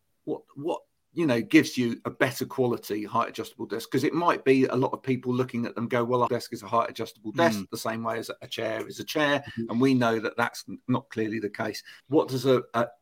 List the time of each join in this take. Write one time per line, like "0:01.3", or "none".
0:06.3
0:12.0